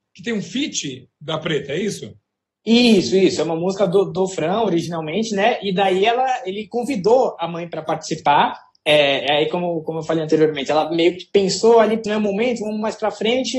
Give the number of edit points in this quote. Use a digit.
1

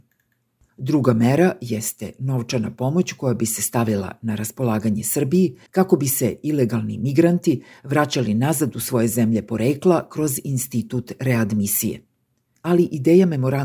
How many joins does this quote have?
1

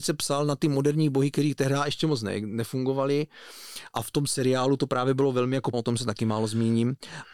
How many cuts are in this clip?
1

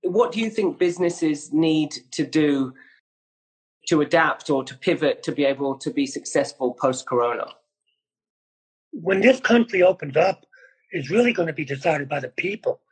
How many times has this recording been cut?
0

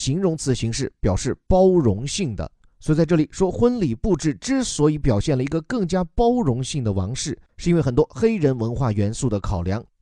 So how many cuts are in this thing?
0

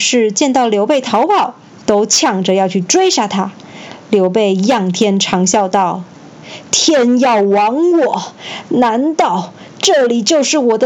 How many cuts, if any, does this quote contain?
0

